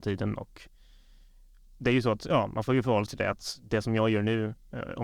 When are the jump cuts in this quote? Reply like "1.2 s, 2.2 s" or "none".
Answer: 3.1 s